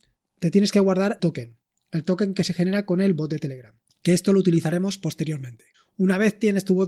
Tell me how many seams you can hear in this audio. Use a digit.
1